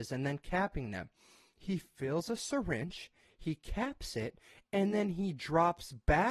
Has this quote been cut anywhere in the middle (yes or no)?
no